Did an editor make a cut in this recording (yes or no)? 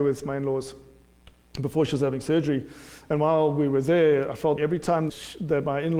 yes